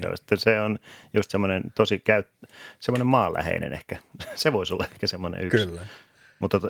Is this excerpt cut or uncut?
uncut